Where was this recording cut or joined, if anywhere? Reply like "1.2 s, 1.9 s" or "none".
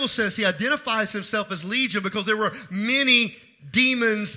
none